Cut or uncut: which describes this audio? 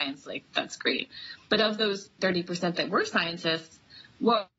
cut